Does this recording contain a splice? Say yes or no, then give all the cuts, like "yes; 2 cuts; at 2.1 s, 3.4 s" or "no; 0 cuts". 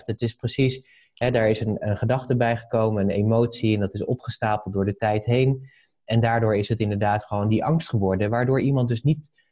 no; 0 cuts